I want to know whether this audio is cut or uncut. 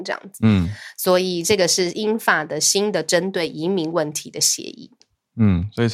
uncut